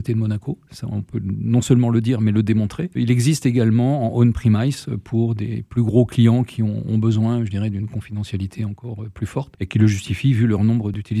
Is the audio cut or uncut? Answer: uncut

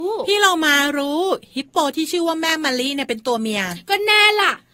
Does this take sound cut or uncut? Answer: uncut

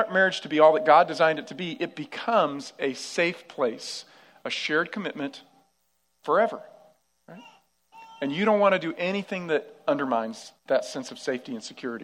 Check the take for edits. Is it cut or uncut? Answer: cut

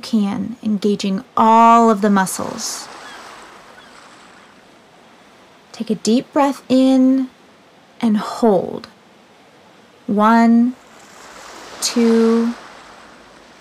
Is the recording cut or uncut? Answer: uncut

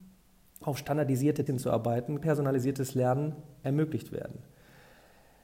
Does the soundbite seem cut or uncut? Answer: cut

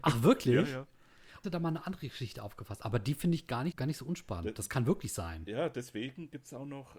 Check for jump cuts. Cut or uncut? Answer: cut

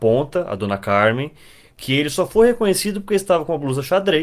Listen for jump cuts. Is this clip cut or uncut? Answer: uncut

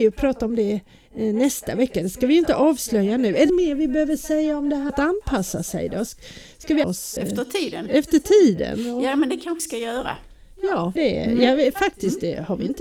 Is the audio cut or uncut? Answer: cut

